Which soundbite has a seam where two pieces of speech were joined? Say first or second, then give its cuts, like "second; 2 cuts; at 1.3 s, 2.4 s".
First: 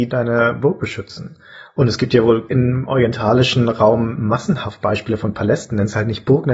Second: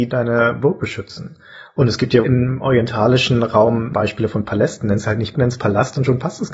second; 3 cuts; at 2.2 s, 3.9 s, 5.3 s